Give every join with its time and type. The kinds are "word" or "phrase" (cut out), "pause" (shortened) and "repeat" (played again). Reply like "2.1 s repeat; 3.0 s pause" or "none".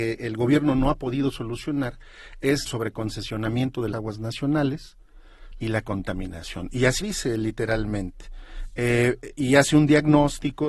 2.7 s phrase; 3.9 s word; 5.6 s phrase; 7.0 s word